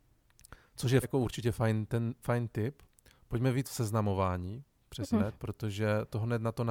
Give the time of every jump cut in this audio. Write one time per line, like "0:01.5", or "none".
0:01.0
0:02.2
0:03.6
0:05.1